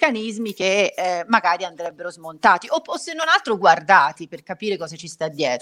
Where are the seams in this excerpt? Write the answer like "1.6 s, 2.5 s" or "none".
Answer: none